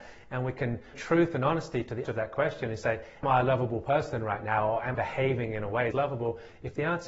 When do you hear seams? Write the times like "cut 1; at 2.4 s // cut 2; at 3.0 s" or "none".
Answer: cut 1; at 0.9 s // cut 2; at 2.1 s // cut 3; at 3.2 s // cut 4; at 4.9 s // cut 5; at 5.9 s